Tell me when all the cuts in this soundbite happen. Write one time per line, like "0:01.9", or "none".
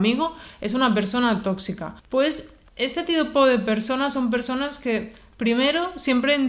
0:02.0